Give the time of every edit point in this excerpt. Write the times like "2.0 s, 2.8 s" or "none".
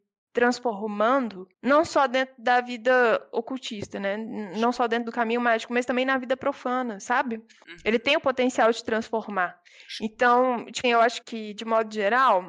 1.5 s, 10.8 s, 11.2 s